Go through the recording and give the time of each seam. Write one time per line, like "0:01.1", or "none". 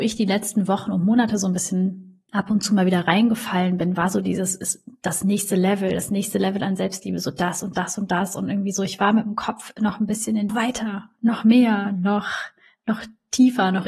0:02.3
0:10.5